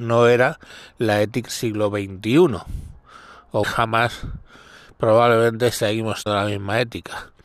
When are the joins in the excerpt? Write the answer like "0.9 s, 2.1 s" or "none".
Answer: 1.5 s, 3.6 s, 6.3 s